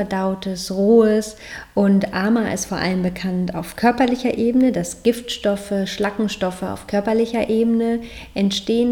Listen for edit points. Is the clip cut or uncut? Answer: uncut